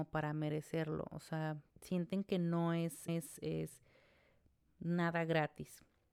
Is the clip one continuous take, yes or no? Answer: no